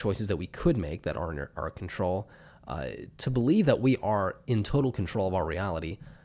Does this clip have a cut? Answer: no; 0 cuts

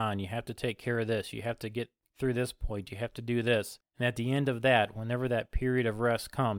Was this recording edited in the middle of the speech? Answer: no; 0 cuts

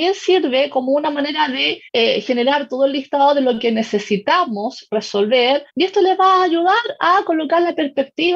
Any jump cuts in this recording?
yes; 2 cuts; at 1.9 s, 5.7 s

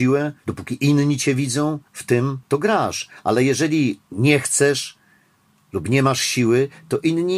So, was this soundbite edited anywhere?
no; 0 cuts

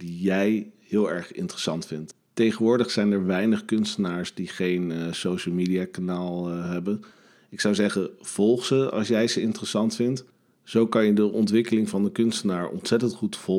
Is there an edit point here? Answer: no; 0 cuts

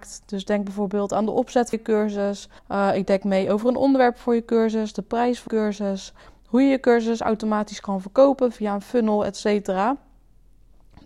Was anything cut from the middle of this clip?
yes; 3 cuts; at 1.7 s, 2.6 s, 5.5 s

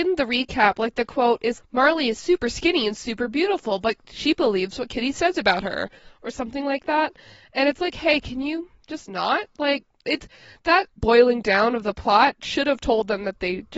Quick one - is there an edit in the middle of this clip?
yes; 3 cuts; at 1.6 s, 9.5 s, 11.0 s

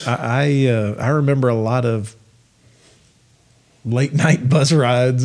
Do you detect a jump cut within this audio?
no; 0 cuts

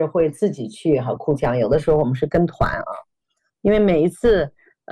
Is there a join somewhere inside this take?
no; 0 cuts

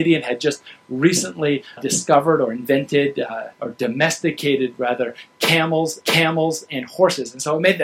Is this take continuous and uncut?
no; 3 cuts; at 1.8 s, 3.5 s, 6.0 s

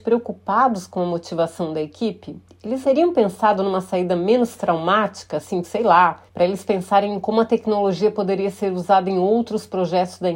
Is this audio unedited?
no; 3 cuts; at 2.8 s, 5.6 s, 6.3 s

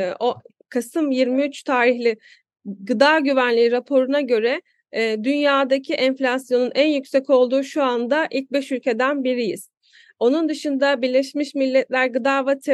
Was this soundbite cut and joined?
no; 0 cuts

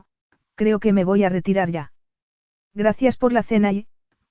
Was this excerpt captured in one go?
yes; 0 cuts

